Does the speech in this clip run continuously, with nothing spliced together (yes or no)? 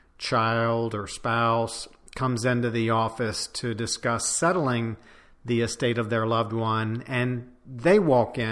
yes